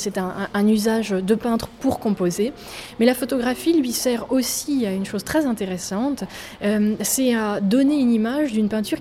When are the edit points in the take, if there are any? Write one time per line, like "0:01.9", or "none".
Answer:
none